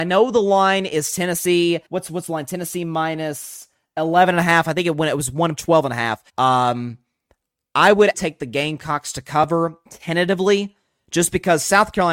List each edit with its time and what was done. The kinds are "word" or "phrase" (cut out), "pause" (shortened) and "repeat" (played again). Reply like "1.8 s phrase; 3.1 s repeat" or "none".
1.9 s pause; 5.6 s word; 6.3 s pause; 8.1 s word; 9.9 s pause